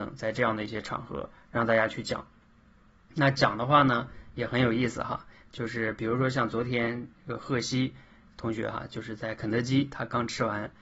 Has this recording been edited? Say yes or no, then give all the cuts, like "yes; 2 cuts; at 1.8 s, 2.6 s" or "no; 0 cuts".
no; 0 cuts